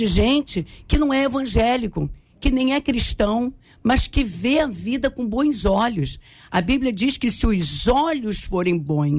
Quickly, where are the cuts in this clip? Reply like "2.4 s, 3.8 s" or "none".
none